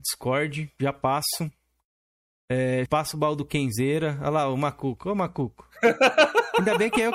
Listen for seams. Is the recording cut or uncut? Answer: cut